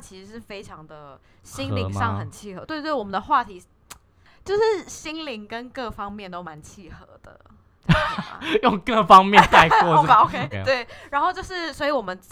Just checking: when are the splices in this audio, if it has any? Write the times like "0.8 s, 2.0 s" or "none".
10.1 s, 10.5 s